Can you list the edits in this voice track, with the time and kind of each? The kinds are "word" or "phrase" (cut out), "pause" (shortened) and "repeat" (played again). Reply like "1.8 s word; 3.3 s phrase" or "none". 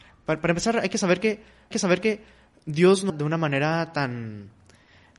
1.7 s repeat; 3.1 s word